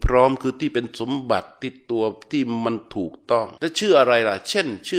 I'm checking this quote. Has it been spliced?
yes; 1 cut; at 3.6 s

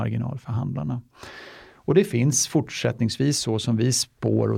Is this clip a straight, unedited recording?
yes; 0 cuts

